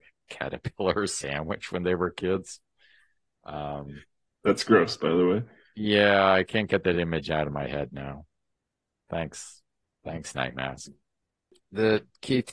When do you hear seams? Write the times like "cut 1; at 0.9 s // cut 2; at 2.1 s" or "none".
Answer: none